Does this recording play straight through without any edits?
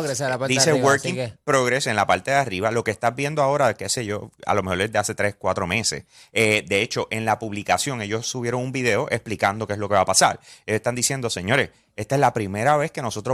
yes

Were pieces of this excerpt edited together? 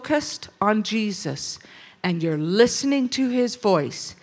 no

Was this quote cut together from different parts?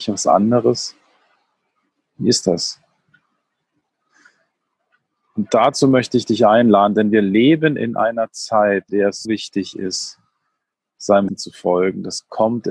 yes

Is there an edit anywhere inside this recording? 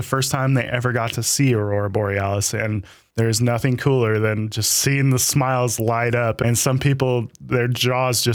no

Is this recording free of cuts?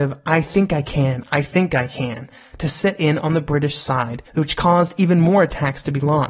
no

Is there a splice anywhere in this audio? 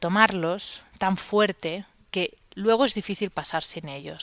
no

